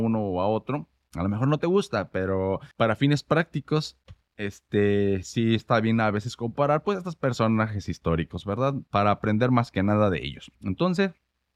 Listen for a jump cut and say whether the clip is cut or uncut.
cut